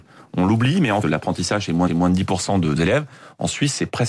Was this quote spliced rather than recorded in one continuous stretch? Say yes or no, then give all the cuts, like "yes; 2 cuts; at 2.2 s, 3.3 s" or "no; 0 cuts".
yes; 3 cuts; at 1.0 s, 1.9 s, 2.8 s